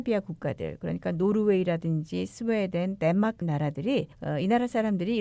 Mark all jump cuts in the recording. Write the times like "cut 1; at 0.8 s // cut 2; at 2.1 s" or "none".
cut 1; at 3.4 s // cut 2; at 4.1 s